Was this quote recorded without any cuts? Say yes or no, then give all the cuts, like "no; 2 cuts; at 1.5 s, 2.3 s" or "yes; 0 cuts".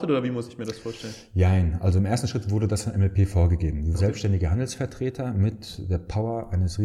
no; 1 cut; at 3.9 s